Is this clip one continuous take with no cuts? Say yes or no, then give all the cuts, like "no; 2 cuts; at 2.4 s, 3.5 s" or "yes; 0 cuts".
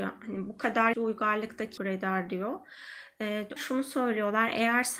no; 3 cuts; at 0.9 s, 1.8 s, 3.6 s